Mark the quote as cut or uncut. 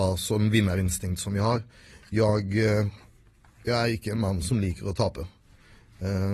uncut